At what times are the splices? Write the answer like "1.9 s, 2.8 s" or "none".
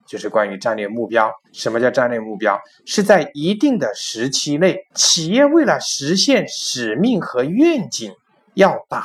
1.5 s, 4.9 s